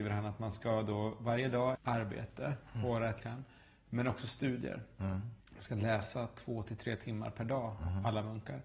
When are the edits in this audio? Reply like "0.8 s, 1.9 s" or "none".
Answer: 1.7 s, 3.2 s, 5.4 s